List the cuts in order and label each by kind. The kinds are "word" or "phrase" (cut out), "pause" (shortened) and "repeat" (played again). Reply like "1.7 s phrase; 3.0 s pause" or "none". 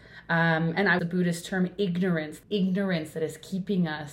1.0 s phrase; 2.4 s word